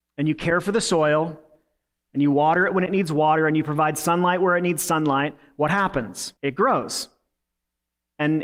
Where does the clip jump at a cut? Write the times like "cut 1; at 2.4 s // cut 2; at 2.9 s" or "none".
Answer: cut 1; at 6.4 s